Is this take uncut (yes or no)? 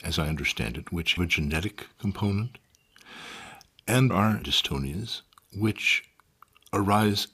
no